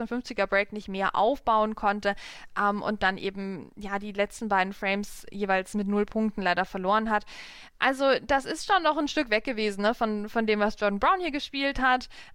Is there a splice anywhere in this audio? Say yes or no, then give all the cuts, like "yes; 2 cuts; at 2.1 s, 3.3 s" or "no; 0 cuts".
no; 0 cuts